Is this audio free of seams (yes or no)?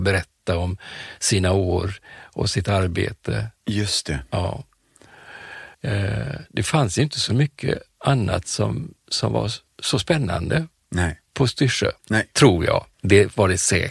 no